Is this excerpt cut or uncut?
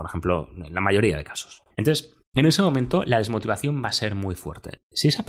cut